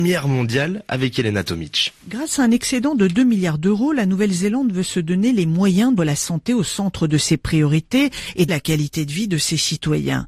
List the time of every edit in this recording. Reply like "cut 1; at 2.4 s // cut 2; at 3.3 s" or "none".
cut 1; at 6.0 s // cut 2; at 8.5 s